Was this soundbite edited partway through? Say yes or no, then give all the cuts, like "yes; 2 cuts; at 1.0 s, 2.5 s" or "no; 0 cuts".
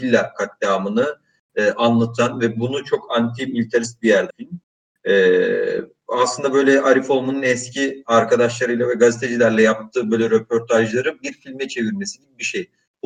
yes; 1 cut; at 4.3 s